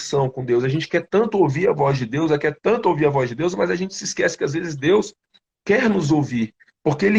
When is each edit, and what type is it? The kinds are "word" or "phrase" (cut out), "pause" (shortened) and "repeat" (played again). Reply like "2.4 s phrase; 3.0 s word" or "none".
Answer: none